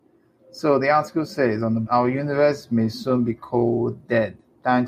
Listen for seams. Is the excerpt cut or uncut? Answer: cut